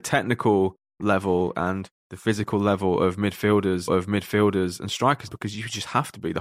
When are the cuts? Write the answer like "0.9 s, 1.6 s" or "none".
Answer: 3.9 s, 5.3 s